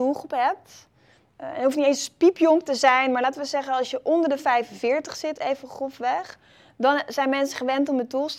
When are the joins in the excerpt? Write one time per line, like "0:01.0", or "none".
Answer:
none